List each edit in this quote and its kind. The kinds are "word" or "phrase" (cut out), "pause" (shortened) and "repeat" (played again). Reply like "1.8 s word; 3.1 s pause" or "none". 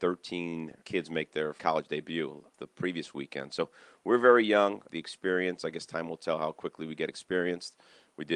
none